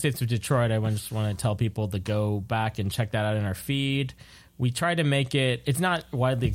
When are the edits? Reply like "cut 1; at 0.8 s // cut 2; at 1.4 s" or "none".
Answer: none